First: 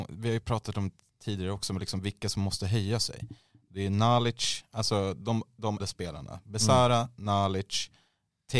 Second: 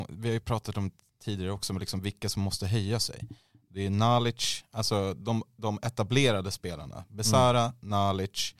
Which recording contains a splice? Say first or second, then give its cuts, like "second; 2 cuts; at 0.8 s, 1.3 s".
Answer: first; 1 cut; at 5.8 s